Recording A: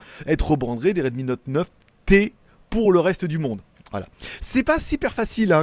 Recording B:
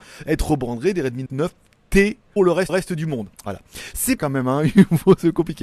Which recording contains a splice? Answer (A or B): B